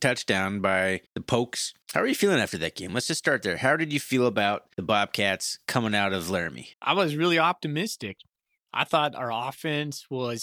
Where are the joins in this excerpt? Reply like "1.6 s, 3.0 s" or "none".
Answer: 1.1 s, 1.8 s, 4.7 s, 6.7 s